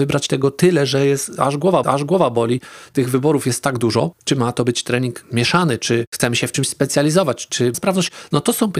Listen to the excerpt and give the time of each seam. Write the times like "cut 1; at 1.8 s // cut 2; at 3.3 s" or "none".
cut 1; at 1.8 s // cut 2; at 7.7 s